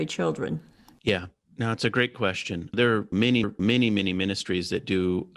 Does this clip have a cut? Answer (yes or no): yes